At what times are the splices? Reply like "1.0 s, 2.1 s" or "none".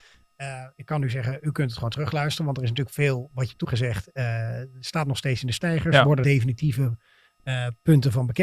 3.6 s, 6.2 s